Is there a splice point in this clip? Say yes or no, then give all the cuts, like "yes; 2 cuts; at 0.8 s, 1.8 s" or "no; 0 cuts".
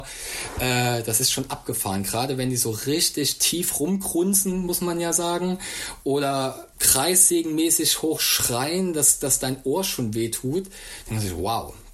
yes; 1 cut; at 6.7 s